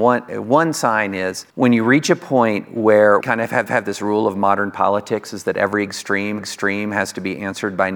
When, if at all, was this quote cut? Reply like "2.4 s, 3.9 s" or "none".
1.5 s, 3.2 s, 3.7 s, 6.4 s